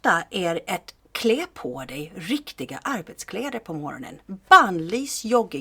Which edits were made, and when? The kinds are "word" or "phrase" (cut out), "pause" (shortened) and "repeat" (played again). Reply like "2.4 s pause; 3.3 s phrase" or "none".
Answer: none